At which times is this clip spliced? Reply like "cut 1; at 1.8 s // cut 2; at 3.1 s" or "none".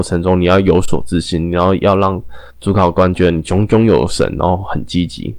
cut 1; at 2.5 s